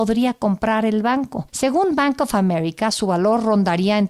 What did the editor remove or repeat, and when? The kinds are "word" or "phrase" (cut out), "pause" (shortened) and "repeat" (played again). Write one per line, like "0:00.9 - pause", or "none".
none